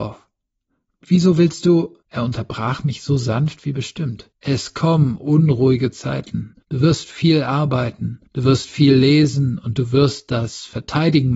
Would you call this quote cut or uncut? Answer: cut